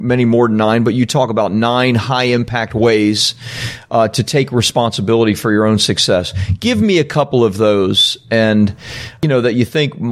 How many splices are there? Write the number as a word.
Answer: zero